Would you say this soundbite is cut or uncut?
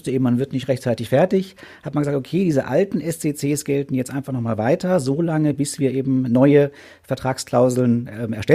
uncut